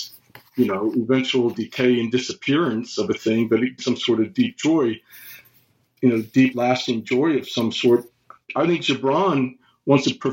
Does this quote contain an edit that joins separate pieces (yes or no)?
yes